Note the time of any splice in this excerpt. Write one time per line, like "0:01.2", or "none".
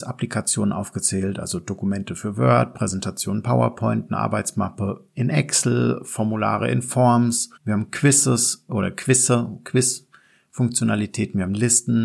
0:07.6